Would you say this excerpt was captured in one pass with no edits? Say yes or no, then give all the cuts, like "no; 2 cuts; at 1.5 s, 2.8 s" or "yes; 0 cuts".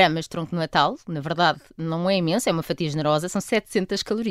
yes; 0 cuts